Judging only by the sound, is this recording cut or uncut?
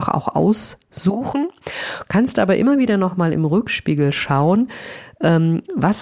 uncut